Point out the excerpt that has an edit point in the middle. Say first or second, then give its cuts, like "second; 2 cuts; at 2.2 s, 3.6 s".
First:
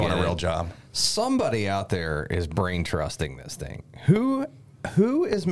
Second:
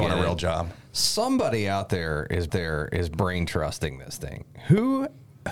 second; 1 cut; at 2.5 s